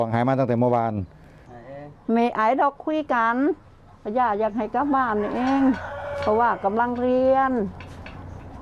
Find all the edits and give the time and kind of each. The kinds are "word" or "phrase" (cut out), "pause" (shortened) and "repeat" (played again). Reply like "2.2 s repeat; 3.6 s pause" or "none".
none